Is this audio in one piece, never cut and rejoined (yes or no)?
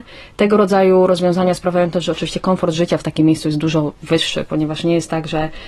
yes